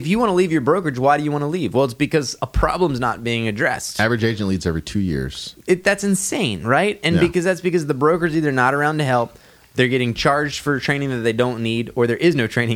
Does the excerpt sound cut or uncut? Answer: uncut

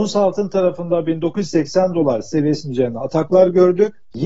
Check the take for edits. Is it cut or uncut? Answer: uncut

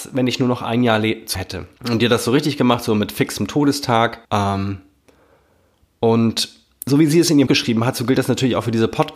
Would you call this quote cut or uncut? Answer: cut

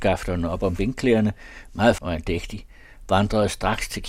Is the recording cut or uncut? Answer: cut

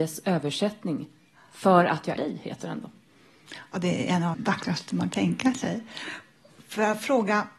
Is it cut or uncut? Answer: cut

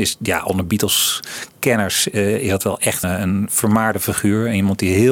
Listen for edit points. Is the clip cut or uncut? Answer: cut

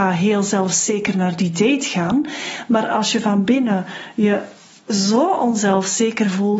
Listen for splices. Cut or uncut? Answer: uncut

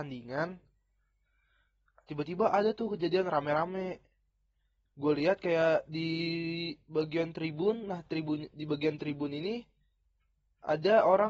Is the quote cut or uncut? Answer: uncut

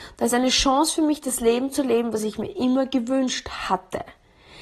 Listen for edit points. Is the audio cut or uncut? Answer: uncut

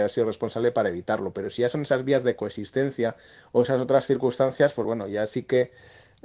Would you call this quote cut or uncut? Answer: uncut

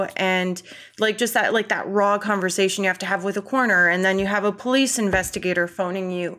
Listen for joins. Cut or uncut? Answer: uncut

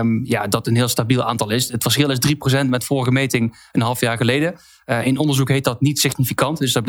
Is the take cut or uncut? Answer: uncut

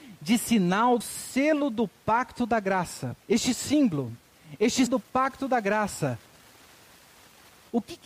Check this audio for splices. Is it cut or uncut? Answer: cut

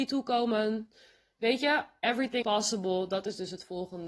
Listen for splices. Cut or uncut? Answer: cut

